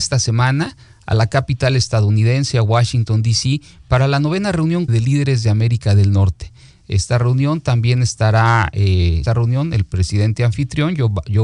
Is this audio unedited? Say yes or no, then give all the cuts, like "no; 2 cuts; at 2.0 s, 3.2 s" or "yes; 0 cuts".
no; 2 cuts; at 4.9 s, 9.3 s